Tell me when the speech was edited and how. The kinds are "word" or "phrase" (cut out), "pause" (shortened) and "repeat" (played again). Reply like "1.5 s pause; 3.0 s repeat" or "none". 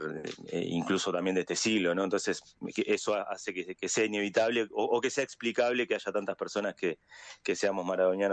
none